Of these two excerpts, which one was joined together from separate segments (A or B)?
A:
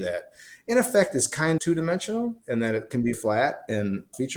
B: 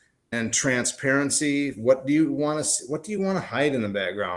A